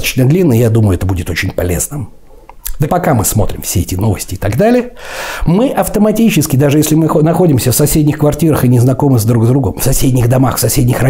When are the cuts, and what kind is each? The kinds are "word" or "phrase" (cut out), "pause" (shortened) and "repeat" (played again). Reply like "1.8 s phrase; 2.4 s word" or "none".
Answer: 2.9 s word